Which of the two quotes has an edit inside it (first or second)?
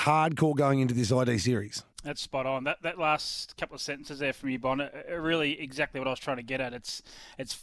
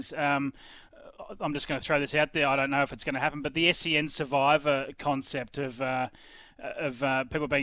first